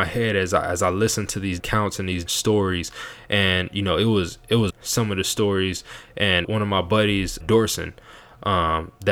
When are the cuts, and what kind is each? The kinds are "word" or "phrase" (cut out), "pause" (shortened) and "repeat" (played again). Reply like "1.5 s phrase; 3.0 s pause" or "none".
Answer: 1.6 s word; 2.3 s word; 4.7 s phrase; 6.4 s word; 7.4 s word